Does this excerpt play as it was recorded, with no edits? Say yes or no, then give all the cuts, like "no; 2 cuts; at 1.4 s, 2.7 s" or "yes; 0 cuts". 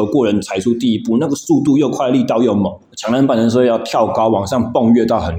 no; 1 cut; at 2.8 s